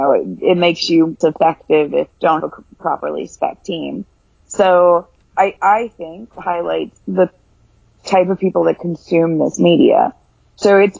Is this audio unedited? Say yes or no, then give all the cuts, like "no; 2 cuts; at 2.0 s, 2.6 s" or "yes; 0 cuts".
no; 6 cuts; at 1.2 s, 2.1 s, 2.4 s, 5.2 s, 6.3 s, 7.0 s